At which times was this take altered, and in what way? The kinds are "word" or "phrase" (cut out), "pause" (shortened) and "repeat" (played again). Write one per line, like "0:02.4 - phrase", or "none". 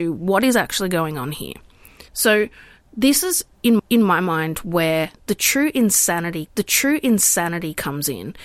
0:02.1 - pause
0:03.8 - repeat
0:06.5 - repeat